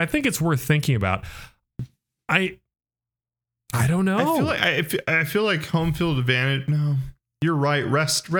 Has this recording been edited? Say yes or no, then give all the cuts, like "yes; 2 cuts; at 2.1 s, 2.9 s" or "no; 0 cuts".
no; 0 cuts